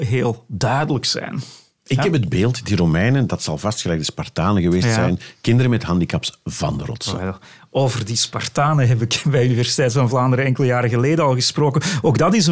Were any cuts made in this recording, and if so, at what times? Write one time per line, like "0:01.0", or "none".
none